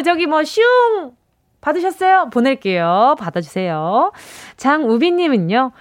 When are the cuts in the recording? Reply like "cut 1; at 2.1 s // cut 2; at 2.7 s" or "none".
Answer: none